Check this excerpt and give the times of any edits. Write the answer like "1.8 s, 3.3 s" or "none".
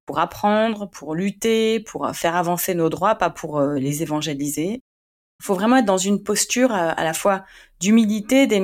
none